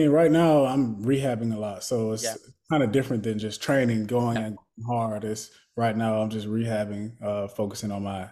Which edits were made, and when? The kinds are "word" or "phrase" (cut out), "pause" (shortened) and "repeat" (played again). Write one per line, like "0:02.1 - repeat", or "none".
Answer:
none